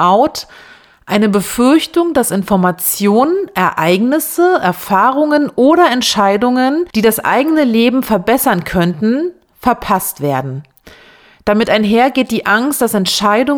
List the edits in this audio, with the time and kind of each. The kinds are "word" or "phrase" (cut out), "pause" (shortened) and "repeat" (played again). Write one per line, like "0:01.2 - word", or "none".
0:06.9 - pause